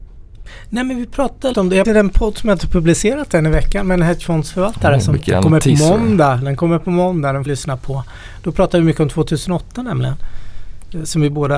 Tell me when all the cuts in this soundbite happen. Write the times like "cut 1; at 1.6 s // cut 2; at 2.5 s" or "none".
cut 1; at 1.5 s // cut 2; at 1.8 s // cut 3; at 7.5 s